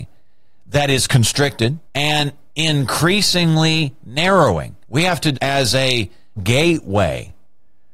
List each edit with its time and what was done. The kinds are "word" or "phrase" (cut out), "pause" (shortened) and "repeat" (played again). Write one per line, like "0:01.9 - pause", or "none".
0:01.9 - pause
0:04.8 - pause
0:05.3 - phrase
0:06.4 - word